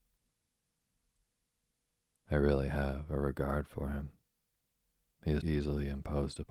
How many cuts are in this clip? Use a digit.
1